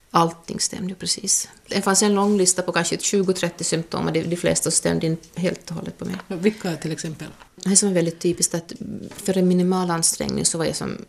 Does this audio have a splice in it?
yes; 2 cuts; at 5.3 s, 7.5 s

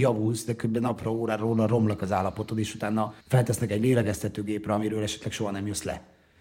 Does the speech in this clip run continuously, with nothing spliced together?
no; 2 cuts; at 1.0 s, 3.2 s

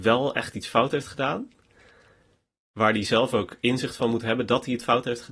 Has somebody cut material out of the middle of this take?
no; 0 cuts

